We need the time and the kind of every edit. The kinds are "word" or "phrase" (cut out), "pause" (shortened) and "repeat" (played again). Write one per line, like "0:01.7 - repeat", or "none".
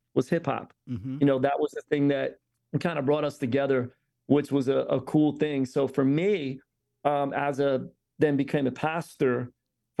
none